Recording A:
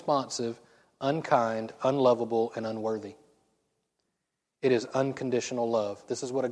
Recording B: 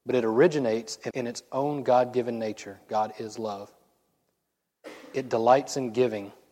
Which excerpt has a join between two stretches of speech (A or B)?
B